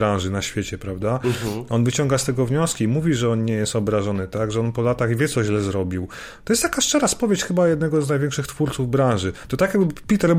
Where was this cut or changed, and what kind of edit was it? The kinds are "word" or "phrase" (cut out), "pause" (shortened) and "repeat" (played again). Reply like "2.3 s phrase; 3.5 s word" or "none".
none